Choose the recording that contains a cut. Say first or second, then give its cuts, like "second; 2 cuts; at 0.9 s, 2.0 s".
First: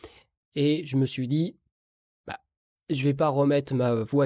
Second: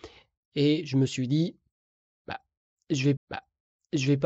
second; 1 cut; at 3.2 s